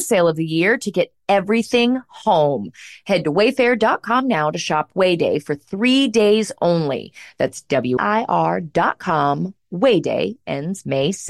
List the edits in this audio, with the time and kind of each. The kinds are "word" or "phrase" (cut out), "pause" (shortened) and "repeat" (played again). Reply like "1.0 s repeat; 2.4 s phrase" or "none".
8.0 s phrase